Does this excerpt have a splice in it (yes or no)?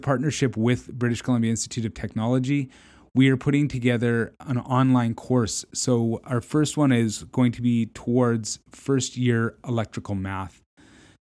no